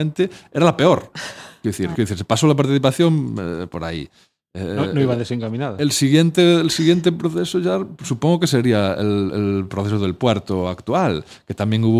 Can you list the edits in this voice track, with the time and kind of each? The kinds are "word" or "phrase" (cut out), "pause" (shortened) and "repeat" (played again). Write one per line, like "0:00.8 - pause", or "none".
0:01.9 - word